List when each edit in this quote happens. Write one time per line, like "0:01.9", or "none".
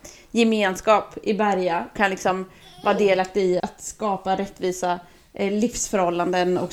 0:02.0
0:03.6

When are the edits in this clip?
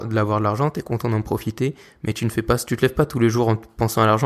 none

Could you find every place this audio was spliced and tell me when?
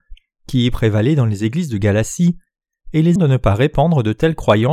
0:03.2

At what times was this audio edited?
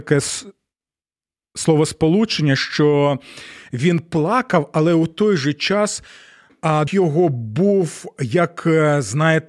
0:06.9

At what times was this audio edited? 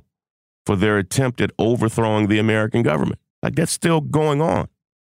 0:03.3

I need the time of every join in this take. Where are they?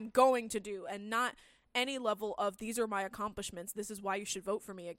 none

